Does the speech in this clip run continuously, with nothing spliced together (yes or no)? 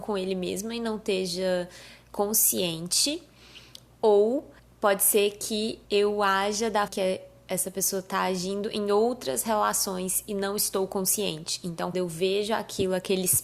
no